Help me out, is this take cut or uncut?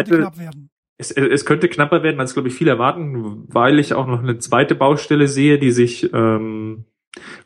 uncut